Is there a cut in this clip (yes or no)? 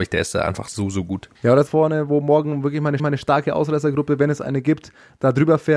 yes